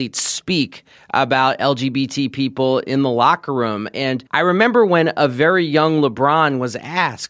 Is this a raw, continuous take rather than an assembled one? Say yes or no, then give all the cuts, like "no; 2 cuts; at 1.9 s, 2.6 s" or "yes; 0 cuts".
no; 1 cut; at 4.3 s